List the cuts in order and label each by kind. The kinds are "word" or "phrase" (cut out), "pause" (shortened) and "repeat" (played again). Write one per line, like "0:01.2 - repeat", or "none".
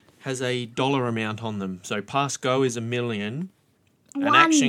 none